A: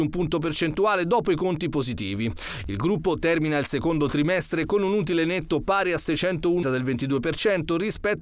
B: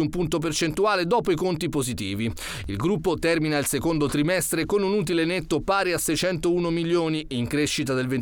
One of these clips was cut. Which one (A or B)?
A